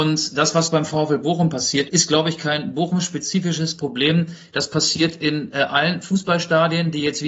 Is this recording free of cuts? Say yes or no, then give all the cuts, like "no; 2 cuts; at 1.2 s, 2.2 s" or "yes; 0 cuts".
no; 1 cut; at 1.9 s